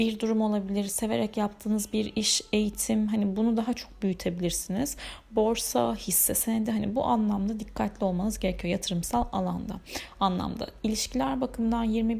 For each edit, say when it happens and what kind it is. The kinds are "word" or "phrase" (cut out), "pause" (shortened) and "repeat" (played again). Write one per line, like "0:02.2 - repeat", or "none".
none